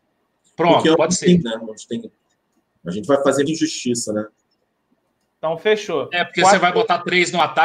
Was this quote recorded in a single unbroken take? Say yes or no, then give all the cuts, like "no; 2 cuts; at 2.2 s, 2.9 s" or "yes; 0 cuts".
no; 3 cuts; at 1.4 s, 3.1 s, 3.5 s